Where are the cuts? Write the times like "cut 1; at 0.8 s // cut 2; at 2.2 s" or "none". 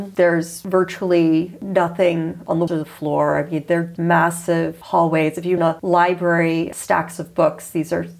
cut 1; at 2.7 s // cut 2; at 4.0 s // cut 3; at 5.6 s // cut 4; at 6.7 s